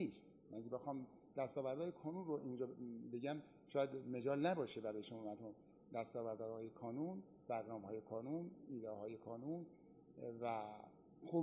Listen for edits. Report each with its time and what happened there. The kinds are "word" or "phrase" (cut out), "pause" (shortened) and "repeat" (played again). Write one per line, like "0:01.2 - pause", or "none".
none